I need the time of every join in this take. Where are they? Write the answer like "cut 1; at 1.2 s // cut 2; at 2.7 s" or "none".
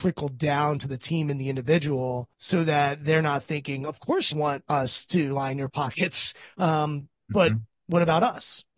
cut 1; at 2.3 s // cut 2; at 4.3 s